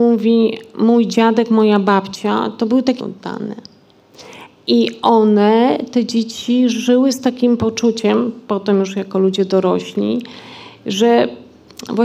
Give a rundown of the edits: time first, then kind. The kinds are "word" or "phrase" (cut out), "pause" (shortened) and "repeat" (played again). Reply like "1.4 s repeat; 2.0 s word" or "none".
3.0 s word